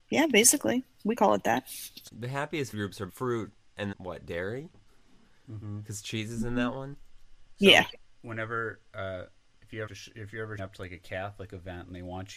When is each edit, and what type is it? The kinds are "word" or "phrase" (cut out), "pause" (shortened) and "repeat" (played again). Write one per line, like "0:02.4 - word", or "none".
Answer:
0:01.2 - word
0:02.1 - word
0:02.7 - word
0:03.1 - word
0:03.9 - word
0:09.9 - word
0:10.6 - word

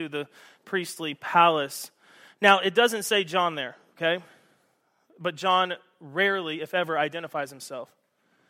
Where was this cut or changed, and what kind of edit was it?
none

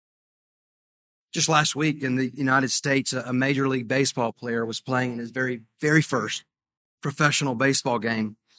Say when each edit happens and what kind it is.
none

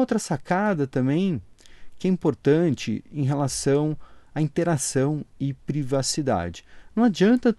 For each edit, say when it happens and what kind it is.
none

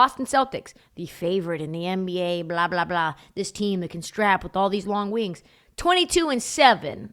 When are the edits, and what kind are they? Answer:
none

